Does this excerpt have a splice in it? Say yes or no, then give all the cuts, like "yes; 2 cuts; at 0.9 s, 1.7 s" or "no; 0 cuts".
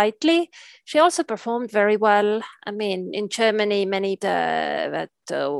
yes; 1 cut; at 4.2 s